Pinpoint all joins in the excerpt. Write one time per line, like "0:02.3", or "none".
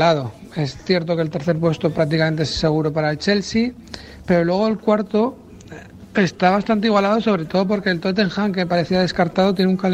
none